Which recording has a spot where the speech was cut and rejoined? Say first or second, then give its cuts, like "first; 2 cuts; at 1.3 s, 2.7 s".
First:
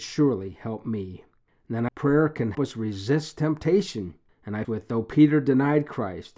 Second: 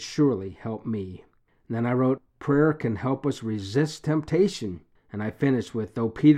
first; 3 cuts; at 1.9 s, 2.5 s, 4.6 s